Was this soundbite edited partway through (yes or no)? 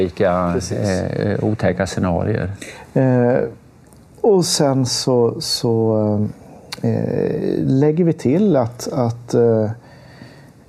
no